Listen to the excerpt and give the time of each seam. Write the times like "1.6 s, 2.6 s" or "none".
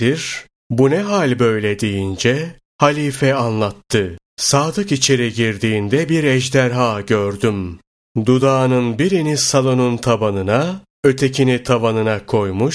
4.3 s